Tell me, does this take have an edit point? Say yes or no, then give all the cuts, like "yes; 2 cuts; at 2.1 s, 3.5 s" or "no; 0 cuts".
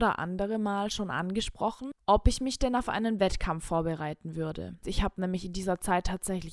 no; 0 cuts